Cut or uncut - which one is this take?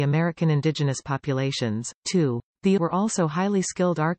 cut